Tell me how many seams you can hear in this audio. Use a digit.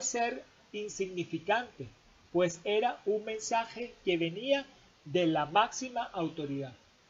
0